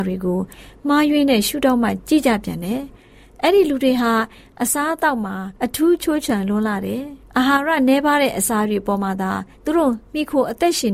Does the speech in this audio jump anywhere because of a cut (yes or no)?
yes